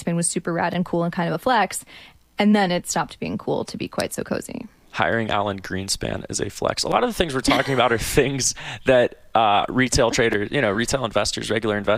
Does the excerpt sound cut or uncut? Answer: uncut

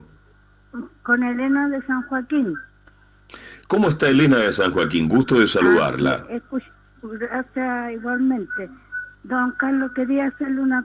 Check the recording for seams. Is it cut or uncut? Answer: uncut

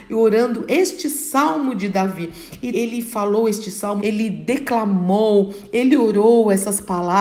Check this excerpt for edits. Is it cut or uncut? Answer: cut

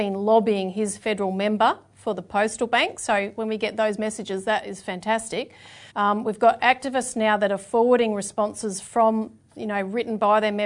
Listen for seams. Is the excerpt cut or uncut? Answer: cut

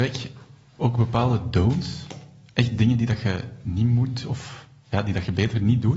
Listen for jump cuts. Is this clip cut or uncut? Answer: uncut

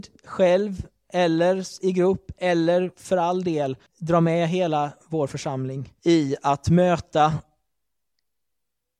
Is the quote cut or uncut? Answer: cut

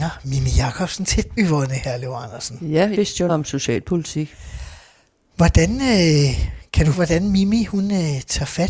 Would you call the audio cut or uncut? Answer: cut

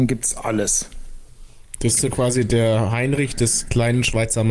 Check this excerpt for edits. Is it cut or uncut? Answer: uncut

